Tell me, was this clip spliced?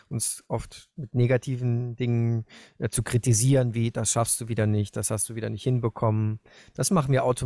no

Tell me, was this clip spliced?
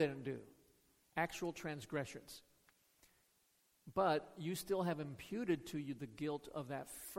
no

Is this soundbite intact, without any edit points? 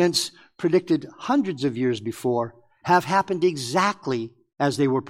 yes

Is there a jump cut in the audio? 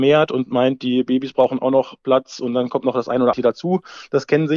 yes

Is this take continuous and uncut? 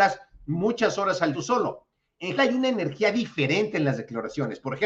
no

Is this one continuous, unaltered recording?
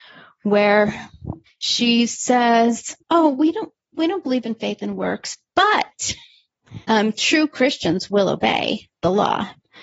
no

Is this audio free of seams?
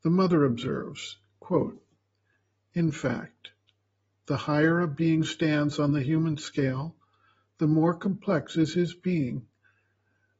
yes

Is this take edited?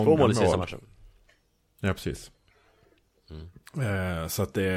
no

